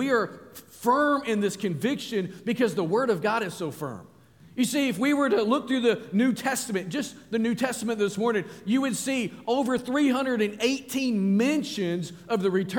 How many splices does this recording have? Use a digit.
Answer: 0